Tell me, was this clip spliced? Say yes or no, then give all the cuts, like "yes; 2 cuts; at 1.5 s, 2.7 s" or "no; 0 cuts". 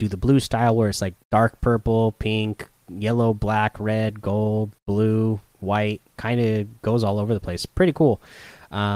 yes; 3 cuts; at 1.2 s, 4.8 s, 6.1 s